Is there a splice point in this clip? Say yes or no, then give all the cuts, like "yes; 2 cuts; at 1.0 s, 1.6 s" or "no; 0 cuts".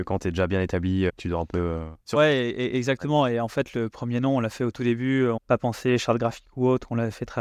yes; 3 cuts; at 1.1 s, 2.0 s, 5.4 s